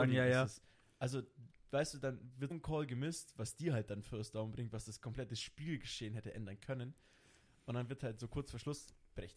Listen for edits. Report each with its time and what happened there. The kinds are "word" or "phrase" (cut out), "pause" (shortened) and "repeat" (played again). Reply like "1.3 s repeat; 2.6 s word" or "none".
2.5 s word